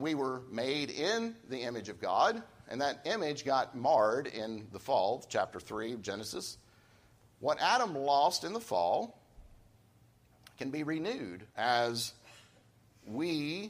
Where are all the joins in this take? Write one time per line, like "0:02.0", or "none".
0:11.5